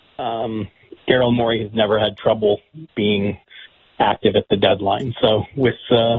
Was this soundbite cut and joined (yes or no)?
no